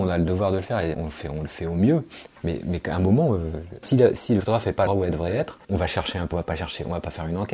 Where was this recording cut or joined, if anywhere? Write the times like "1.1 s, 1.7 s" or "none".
0.9 s, 2.4 s, 3.8 s, 4.4 s, 4.9 s, 5.6 s, 6.3 s

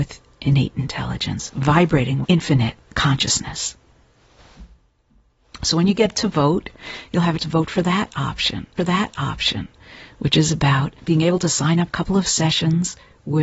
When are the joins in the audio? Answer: 2.2 s, 7.4 s, 8.8 s, 11.0 s, 11.9 s

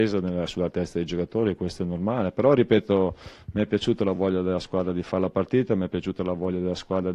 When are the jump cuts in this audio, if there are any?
none

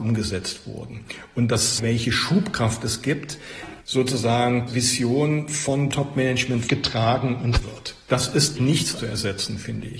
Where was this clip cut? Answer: 1.8 s, 3.8 s, 4.7 s, 5.9 s, 6.7 s, 7.6 s, 8.6 s, 9.0 s

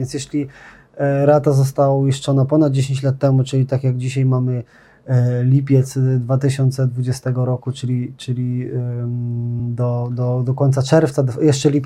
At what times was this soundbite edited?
none

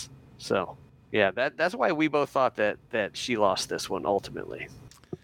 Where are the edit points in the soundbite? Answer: none

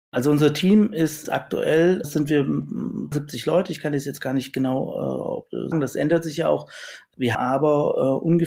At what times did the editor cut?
1.2 s, 2.0 s, 3.1 s, 5.7 s, 7.3 s

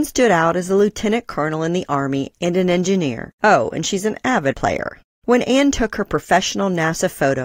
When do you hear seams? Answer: 3.4 s, 4.5 s

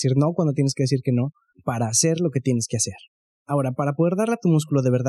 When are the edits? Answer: none

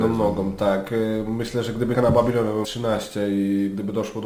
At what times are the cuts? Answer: 1.9 s, 2.6 s

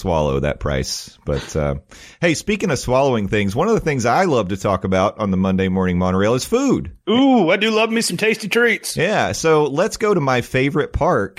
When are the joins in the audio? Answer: 7.0 s

